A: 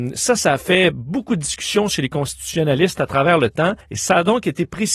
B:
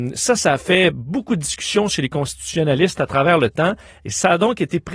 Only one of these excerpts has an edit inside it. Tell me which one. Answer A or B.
A